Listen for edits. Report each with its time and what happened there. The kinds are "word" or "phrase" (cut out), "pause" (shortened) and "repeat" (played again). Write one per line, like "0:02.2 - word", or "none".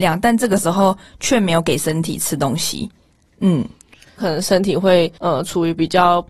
0:04.2 - phrase
0:05.2 - pause